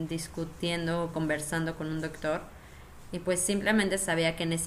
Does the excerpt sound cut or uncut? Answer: uncut